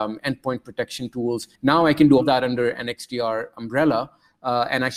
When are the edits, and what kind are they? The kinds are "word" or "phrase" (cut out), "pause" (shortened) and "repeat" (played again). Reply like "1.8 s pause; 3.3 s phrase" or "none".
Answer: 1.5 s pause; 2.2 s word